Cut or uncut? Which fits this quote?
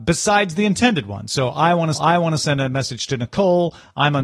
cut